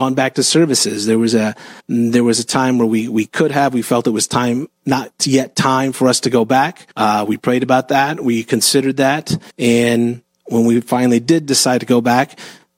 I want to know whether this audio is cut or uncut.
cut